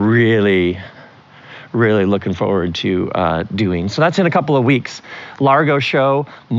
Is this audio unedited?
yes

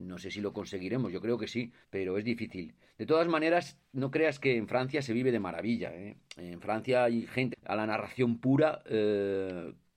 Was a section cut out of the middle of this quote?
yes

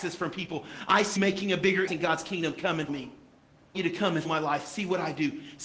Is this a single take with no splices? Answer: no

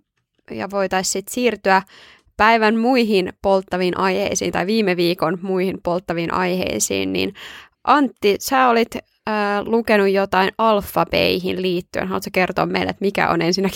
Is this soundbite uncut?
yes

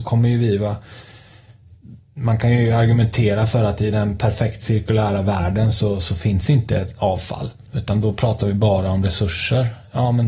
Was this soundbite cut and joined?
yes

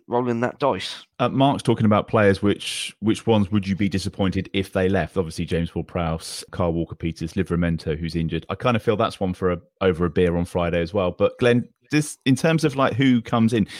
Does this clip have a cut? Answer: no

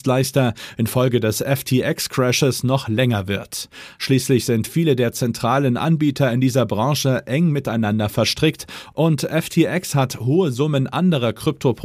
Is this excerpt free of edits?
yes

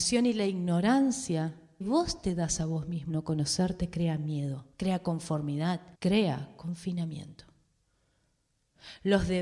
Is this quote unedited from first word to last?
no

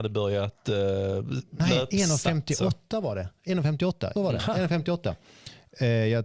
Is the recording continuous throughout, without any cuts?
no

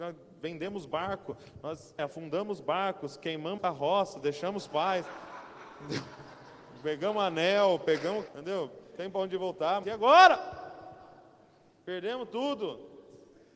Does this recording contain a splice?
yes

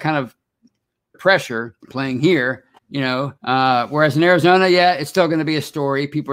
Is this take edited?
yes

